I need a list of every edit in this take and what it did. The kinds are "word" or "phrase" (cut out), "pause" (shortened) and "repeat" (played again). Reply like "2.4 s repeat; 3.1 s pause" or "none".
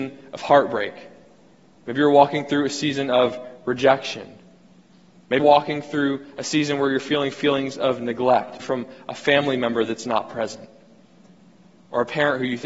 5.4 s word; 8.6 s word